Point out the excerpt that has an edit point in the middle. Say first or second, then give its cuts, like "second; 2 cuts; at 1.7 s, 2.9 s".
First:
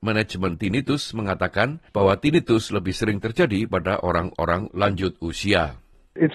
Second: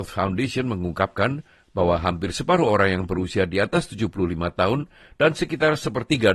first; 1 cut; at 1.9 s